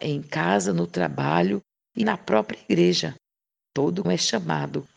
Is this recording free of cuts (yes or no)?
no